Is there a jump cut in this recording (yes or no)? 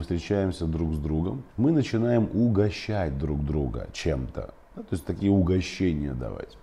yes